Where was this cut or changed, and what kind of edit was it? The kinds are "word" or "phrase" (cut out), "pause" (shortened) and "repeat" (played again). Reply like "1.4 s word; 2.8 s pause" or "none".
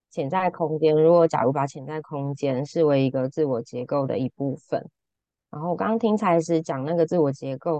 none